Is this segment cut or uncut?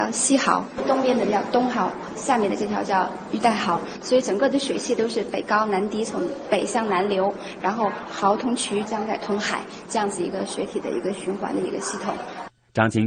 cut